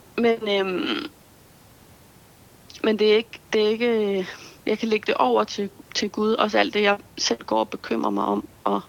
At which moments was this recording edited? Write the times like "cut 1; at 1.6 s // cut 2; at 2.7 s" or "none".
cut 1; at 3.5 s // cut 2; at 4.6 s // cut 3; at 5.9 s